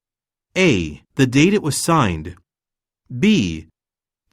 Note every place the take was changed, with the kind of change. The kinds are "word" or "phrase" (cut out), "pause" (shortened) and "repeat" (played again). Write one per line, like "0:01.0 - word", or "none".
0:01.1 - pause